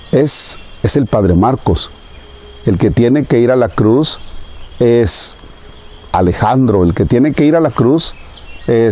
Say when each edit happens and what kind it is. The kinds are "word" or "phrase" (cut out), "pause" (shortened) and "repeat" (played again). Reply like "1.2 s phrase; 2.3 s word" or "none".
6.1 s word